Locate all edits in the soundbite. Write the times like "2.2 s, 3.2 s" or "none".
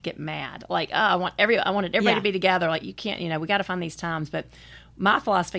none